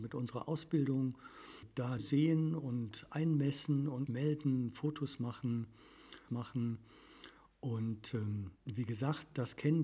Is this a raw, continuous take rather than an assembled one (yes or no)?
no